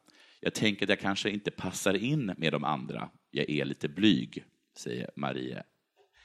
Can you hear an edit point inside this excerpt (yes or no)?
no